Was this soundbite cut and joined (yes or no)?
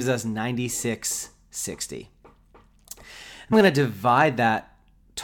yes